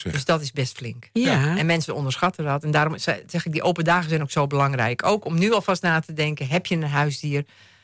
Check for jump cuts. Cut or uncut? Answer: uncut